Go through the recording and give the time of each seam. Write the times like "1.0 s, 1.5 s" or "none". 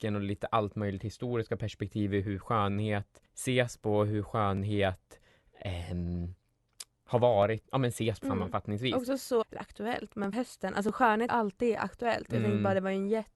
3.3 s, 7.0 s, 7.6 s, 8.2 s, 9.4 s, 10.3 s, 11.3 s